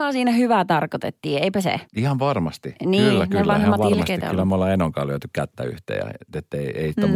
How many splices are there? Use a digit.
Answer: 1